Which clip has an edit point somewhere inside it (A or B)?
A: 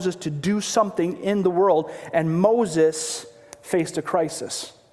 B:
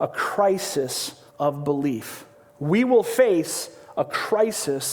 B